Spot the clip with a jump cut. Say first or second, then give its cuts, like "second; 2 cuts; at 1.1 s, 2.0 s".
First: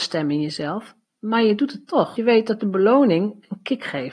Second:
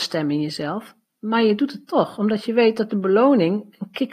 first; 1 cut; at 2.2 s